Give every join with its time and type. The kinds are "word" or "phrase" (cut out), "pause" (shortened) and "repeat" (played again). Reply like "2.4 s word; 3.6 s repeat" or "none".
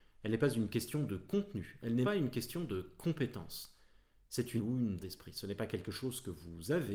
2.0 s word; 4.6 s word; 5.0 s word